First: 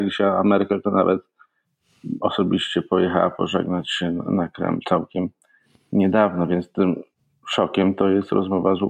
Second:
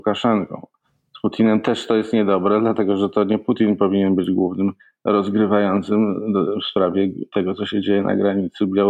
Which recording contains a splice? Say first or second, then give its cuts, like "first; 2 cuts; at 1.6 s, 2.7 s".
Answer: second; 1 cut; at 4.8 s